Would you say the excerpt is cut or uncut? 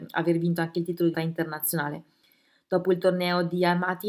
cut